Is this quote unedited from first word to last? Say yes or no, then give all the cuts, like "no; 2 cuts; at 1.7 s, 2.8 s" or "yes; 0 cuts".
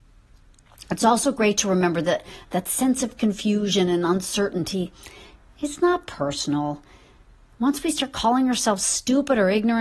yes; 0 cuts